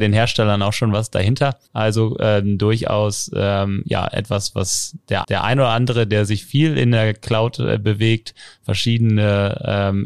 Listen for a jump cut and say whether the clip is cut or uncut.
cut